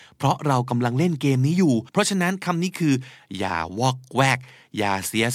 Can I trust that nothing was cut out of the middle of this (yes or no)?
no